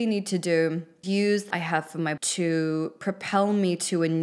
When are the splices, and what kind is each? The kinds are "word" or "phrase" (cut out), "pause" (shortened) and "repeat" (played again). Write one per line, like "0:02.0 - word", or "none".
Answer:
0:01.0 - word
0:01.5 - word
0:02.2 - word